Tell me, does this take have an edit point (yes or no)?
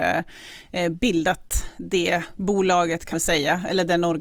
yes